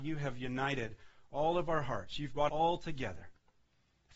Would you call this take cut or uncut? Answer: cut